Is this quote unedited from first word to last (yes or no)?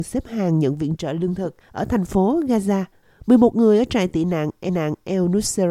no